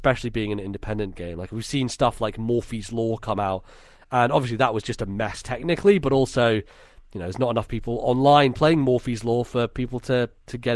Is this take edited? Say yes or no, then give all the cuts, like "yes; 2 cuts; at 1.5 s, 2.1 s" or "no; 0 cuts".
no; 0 cuts